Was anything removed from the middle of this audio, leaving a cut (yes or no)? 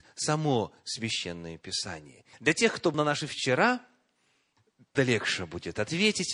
yes